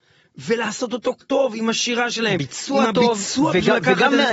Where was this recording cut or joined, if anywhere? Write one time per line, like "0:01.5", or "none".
0:01.2